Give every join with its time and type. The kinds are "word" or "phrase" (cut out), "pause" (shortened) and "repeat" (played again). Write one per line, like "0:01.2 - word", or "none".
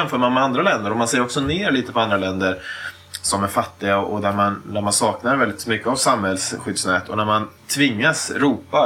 0:07.6 - pause